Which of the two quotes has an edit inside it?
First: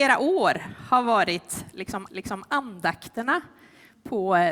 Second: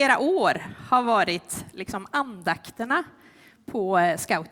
first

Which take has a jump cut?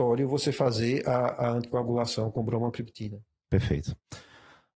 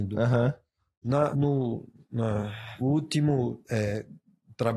second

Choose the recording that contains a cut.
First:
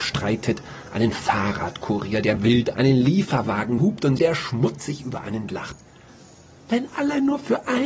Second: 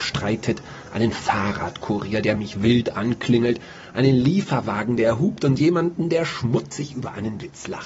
first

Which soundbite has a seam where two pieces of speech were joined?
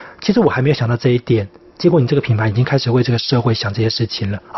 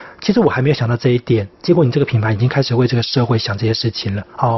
second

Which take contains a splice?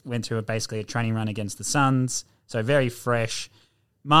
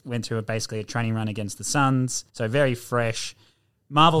second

